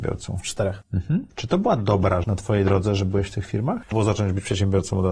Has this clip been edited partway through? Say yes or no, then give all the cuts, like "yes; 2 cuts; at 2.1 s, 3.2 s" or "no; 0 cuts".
yes; 2 cuts; at 2.2 s, 3.9 s